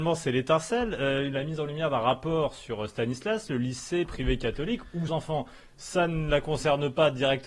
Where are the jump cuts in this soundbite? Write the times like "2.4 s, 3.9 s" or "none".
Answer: 5.1 s